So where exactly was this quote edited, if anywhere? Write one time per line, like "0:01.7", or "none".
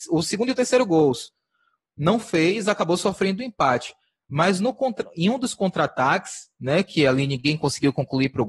none